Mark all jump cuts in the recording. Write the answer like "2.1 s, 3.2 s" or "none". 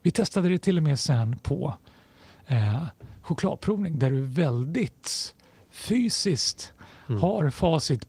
none